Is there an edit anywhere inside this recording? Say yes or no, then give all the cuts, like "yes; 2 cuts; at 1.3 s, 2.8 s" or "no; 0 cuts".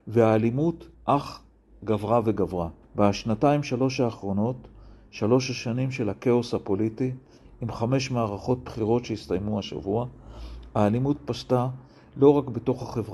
yes; 2 cuts; at 0.9 s, 2.8 s